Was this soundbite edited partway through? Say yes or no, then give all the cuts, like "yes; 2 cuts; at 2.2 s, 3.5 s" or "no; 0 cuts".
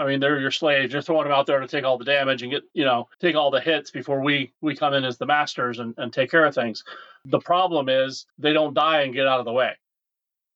yes; 2 cuts; at 3.1 s, 8.3 s